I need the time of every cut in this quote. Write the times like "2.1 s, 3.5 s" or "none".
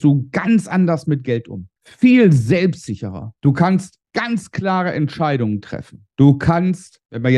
3.4 s, 4.1 s, 6.1 s